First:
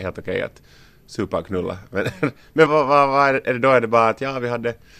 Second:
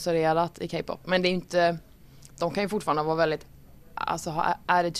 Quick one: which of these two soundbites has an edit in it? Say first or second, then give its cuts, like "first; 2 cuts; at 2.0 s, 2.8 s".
first; 1 cut; at 2.7 s